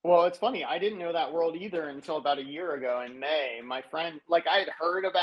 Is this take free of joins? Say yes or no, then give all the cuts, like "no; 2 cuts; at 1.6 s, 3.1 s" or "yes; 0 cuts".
yes; 0 cuts